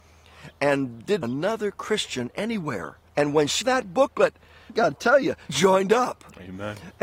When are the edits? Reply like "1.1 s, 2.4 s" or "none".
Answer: 1.2 s, 3.1 s, 3.6 s, 4.7 s, 5.5 s